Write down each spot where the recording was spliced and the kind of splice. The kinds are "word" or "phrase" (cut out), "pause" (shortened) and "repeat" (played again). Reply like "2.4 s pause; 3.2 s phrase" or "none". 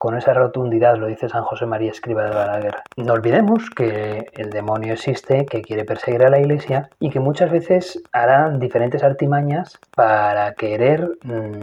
2.9 s pause; 6.9 s pause; 8.1 s pause; 9.9 s pause